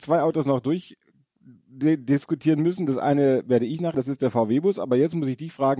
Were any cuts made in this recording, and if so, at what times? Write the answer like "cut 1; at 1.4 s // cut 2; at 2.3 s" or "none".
cut 1; at 3.9 s